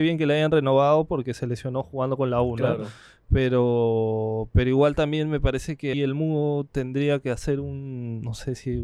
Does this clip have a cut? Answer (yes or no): yes